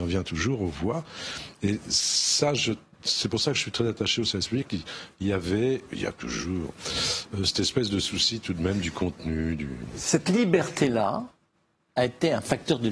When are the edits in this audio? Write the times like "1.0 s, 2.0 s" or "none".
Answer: none